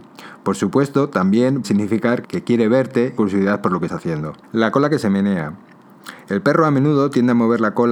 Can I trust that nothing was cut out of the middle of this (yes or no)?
no